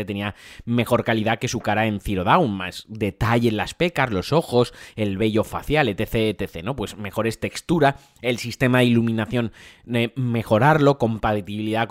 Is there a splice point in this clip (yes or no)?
no